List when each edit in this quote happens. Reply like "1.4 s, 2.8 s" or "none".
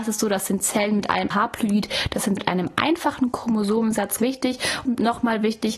1.3 s, 2.4 s, 4.2 s, 4.9 s